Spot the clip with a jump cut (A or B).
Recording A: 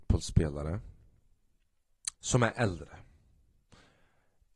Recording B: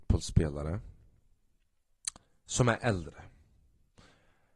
A